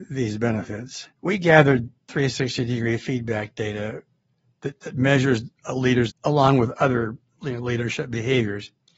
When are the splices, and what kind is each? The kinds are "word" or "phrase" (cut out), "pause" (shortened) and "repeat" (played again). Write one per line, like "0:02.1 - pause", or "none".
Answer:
0:01.1 - pause
0:06.1 - phrase